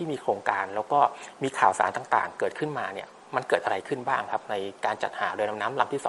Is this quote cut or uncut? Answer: uncut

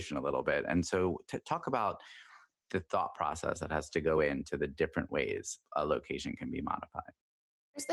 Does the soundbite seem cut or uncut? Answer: uncut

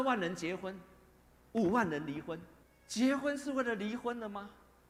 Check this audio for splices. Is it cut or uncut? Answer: cut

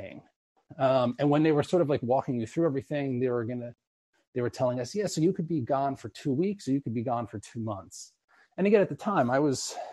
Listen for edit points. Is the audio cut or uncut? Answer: uncut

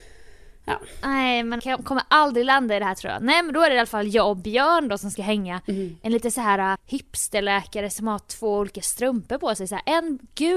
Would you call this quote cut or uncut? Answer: cut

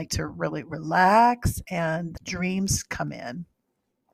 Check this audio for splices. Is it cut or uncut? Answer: cut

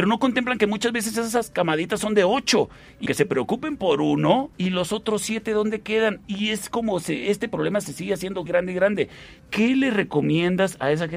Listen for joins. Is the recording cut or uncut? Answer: cut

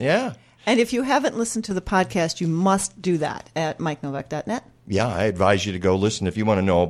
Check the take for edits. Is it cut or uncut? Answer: uncut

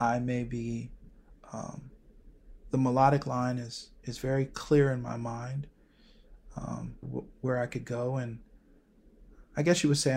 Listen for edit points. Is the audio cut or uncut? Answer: cut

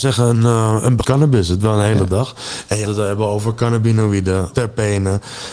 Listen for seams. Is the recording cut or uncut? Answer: cut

